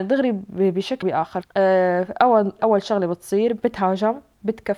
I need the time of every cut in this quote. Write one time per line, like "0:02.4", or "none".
0:01.0
0:01.4
0:02.6